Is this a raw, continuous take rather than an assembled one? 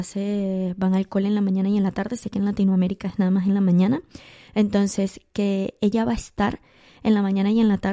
yes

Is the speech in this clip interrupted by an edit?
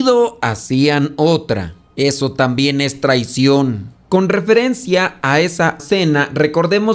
yes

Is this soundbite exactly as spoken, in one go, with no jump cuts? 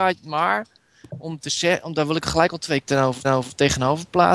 no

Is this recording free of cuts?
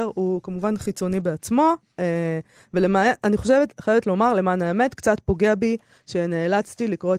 yes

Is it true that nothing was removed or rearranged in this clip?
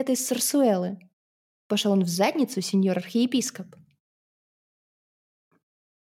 yes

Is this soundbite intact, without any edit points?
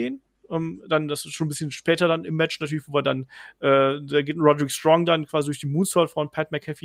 yes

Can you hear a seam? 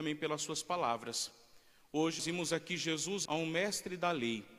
yes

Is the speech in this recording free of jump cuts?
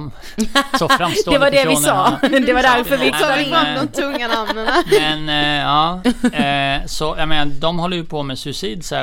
no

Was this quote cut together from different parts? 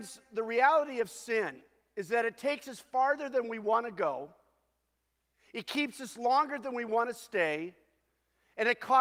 no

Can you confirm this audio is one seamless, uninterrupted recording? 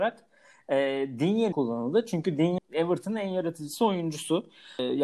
no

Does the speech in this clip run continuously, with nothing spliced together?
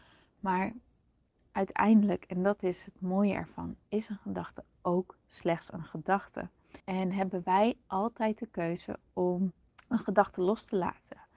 no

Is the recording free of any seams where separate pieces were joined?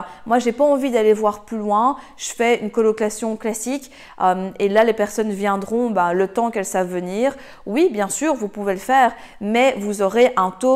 yes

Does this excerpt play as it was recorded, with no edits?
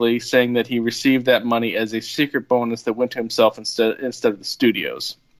yes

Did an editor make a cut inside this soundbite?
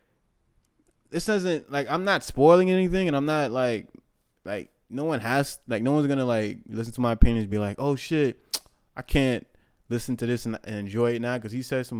no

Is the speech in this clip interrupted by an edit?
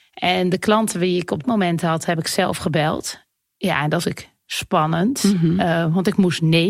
yes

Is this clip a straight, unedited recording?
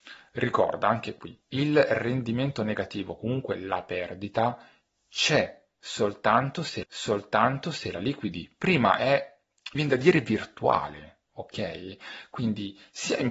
no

